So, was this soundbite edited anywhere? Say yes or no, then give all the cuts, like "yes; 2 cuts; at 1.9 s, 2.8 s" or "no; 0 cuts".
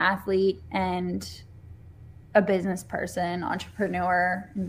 no; 0 cuts